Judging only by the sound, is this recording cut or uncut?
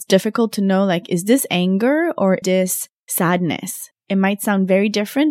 cut